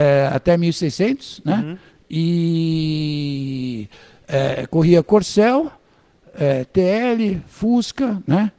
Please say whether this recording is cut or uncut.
uncut